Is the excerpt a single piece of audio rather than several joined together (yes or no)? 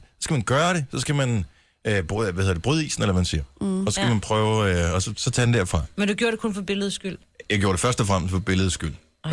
yes